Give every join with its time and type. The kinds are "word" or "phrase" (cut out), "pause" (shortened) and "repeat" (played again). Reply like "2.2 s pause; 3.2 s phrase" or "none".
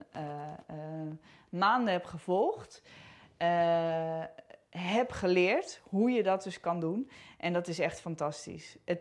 none